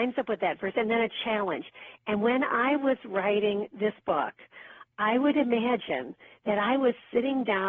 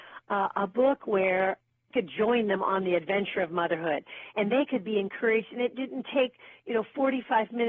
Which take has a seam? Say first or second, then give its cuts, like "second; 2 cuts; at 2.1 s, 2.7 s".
second; 1 cut; at 1.9 s